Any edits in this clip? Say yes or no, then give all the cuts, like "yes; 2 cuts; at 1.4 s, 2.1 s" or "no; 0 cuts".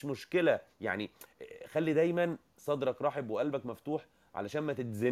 no; 0 cuts